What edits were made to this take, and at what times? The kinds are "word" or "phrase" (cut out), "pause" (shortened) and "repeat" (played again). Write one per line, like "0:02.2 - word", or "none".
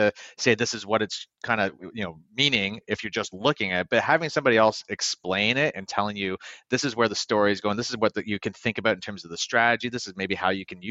none